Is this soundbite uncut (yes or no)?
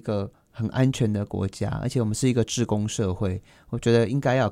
yes